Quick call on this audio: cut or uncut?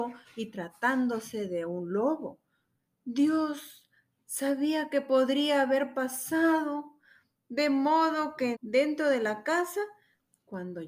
cut